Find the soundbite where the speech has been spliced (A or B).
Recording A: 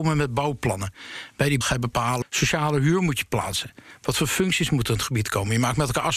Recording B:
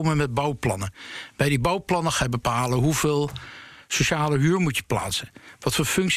A